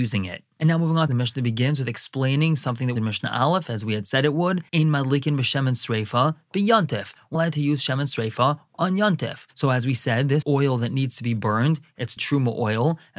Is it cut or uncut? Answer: cut